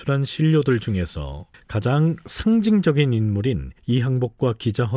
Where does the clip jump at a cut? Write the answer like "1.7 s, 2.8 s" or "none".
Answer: 1.5 s, 3.8 s